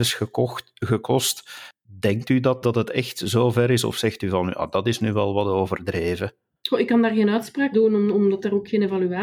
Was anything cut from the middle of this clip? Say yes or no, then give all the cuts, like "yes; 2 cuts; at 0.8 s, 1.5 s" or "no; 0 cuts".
yes; 2 cuts; at 2.6 s, 7.7 s